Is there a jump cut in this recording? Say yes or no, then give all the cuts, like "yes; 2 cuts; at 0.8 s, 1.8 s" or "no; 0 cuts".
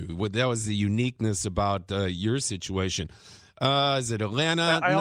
no; 0 cuts